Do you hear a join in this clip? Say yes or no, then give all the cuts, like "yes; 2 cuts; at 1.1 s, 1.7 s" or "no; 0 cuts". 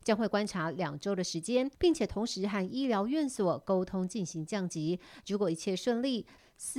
yes; 1 cut; at 1.7 s